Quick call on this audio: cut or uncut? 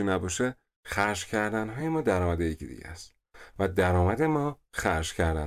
uncut